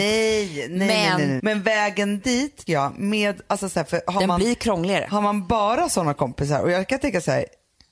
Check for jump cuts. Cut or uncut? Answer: cut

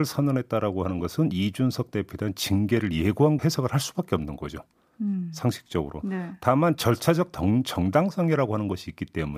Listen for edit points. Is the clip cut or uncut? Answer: cut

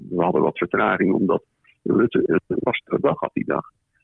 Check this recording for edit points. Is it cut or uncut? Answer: uncut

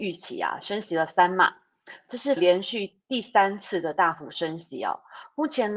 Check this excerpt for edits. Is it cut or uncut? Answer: cut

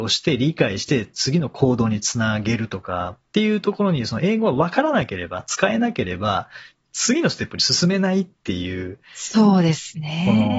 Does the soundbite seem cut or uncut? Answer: uncut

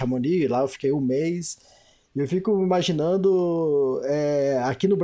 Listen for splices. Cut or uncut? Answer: uncut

